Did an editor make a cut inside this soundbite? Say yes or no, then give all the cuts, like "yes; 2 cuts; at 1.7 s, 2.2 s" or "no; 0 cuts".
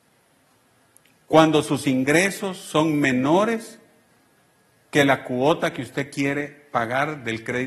no; 0 cuts